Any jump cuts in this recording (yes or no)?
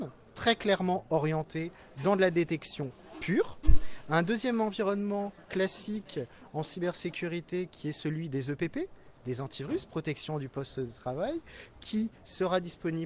no